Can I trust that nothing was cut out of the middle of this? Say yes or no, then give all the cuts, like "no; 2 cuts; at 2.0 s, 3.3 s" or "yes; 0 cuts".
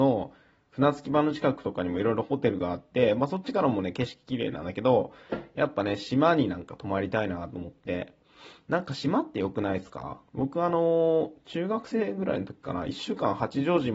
no; 1 cut; at 10.3 s